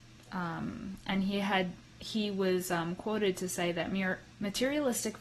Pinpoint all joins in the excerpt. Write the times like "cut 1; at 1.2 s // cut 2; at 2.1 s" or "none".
none